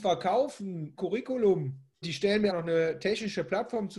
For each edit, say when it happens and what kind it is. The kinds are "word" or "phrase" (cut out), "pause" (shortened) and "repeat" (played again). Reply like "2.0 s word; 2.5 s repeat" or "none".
0.9 s word; 2.0 s word; 2.5 s word